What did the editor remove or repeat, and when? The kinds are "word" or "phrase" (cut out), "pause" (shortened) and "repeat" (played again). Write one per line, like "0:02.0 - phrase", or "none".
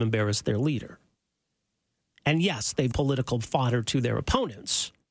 0:02.9 - word